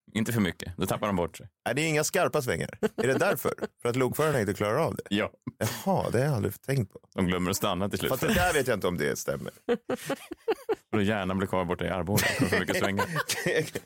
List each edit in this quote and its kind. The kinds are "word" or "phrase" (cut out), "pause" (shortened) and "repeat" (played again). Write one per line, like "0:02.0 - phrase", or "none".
none